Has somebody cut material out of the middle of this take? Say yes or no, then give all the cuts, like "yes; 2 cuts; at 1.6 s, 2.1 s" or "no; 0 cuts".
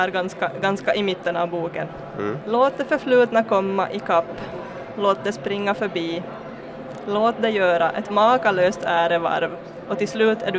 no; 0 cuts